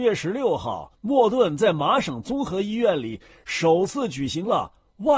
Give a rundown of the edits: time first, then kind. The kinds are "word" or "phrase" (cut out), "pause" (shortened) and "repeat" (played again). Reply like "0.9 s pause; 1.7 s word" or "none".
0.9 s pause